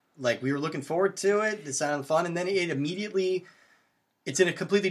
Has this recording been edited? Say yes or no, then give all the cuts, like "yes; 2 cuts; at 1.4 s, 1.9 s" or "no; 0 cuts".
no; 0 cuts